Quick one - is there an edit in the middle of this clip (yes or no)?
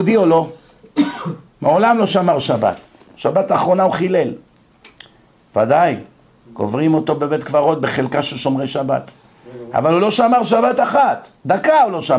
no